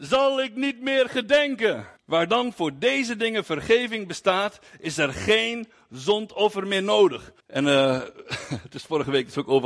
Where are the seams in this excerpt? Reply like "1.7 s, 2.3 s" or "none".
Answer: 2.0 s, 7.4 s